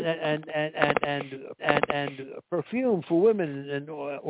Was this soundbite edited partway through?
yes; 1 cut; at 1.6 s

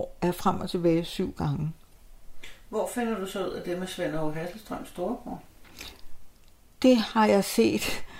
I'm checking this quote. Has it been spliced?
no; 0 cuts

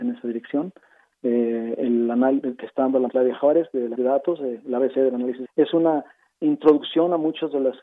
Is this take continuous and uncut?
no; 4 cuts; at 2.4 s, 3.1 s, 3.9 s, 5.4 s

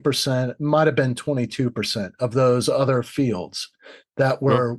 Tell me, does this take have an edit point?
no; 0 cuts

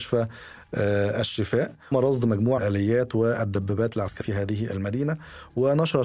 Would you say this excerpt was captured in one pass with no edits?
no; 3 cuts; at 1.9 s, 2.6 s, 4.2 s

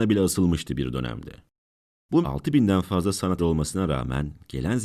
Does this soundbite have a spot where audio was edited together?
yes; 2 cuts; at 2.2 s, 3.4 s

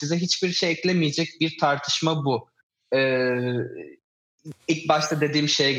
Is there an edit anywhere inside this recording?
no; 0 cuts

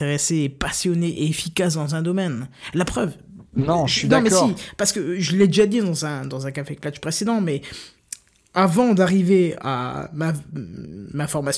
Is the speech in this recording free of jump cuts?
yes; 0 cuts

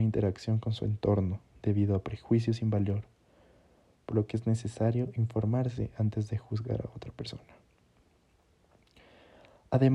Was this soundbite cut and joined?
yes; 1 cut; at 1.5 s

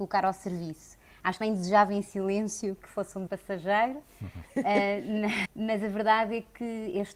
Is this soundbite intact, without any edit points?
no; 4 cuts; at 1.4 s, 2.8 s, 3.3 s, 5.5 s

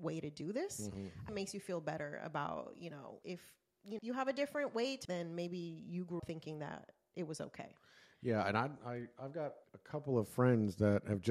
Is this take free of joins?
no; 6 cuts; at 1.3 s, 3.2 s, 4.0 s, 5.0 s, 6.2 s, 9.6 s

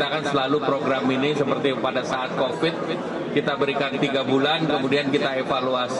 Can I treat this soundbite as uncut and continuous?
yes; 0 cuts

